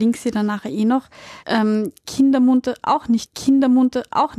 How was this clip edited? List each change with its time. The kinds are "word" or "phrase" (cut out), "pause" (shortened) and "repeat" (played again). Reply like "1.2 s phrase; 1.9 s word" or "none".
1.4 s word; 3.3 s repeat